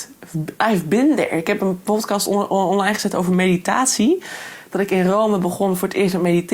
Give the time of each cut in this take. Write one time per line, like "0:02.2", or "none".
none